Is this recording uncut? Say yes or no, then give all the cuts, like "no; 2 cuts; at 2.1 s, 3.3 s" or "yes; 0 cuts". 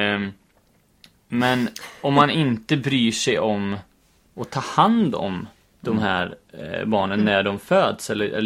yes; 0 cuts